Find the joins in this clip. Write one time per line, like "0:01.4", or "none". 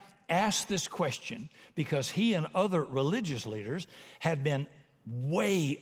none